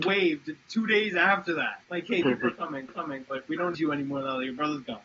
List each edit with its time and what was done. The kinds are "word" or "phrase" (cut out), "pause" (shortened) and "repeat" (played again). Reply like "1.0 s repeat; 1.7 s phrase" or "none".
1.8 s pause; 2.2 s word; 2.9 s repeat; 3.7 s word